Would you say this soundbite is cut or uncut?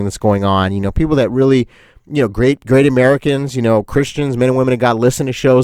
uncut